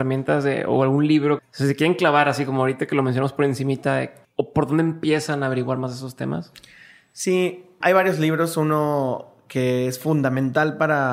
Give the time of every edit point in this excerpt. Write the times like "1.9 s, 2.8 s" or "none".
1.4 s, 4.2 s, 7.8 s